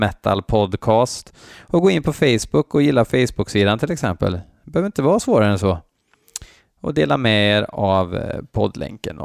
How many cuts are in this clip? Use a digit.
0